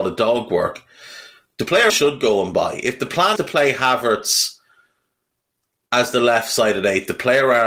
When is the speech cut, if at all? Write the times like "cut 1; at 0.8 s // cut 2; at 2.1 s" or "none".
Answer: cut 1; at 1.9 s // cut 2; at 3.4 s